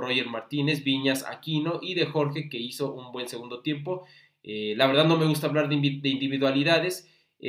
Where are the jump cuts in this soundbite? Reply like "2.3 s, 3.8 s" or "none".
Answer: none

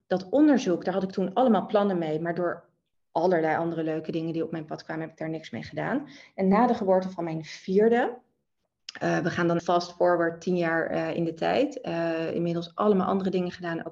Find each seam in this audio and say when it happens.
9.6 s

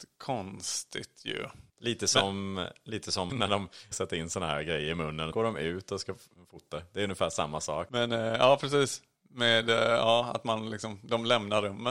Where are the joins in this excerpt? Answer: 1.7 s, 3.3 s, 3.9 s, 5.3 s

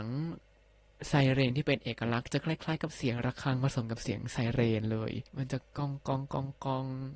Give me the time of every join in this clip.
5.3 s

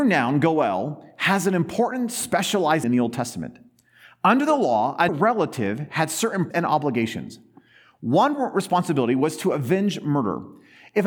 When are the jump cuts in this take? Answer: 2.8 s, 5.1 s, 6.5 s

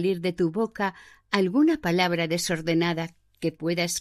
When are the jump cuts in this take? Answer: none

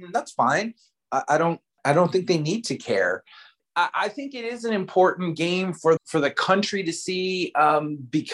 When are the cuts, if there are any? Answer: 6.0 s

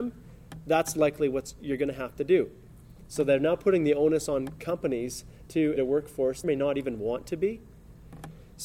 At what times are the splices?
5.8 s, 6.4 s

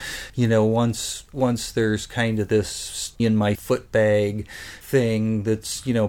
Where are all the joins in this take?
1.3 s, 3.2 s, 3.5 s

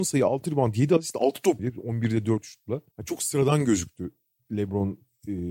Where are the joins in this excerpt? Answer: 1.6 s, 2.9 s

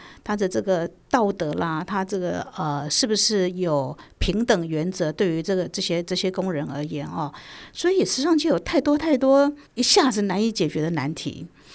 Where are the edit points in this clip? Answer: 9.7 s

